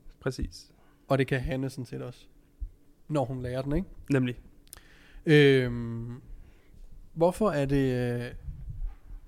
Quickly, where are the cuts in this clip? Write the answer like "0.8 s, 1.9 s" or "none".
none